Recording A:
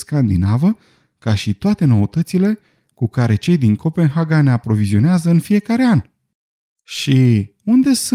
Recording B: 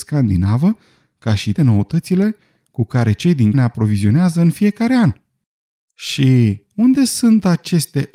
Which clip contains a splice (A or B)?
B